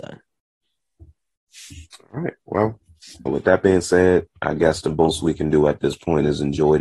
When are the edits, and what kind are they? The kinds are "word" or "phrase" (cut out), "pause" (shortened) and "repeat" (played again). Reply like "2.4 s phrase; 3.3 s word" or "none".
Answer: 3.3 s word